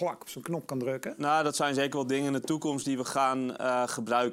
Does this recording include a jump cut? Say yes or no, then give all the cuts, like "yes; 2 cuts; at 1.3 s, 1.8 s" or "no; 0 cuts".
no; 0 cuts